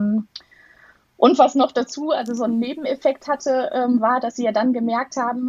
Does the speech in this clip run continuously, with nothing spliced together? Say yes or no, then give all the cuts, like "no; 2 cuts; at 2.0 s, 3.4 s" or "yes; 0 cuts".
yes; 0 cuts